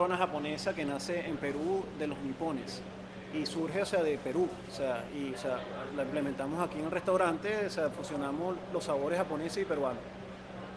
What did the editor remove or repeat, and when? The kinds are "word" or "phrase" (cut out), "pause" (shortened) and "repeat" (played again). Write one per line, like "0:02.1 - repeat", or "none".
0:05.3 - word